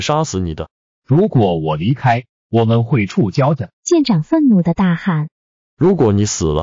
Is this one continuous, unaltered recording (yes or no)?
no